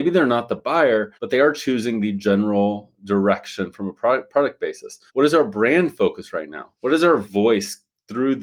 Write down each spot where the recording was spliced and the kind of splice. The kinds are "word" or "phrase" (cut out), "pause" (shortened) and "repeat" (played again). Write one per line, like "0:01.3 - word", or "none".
0:01.1 - pause
0:05.1 - pause
0:06.7 - pause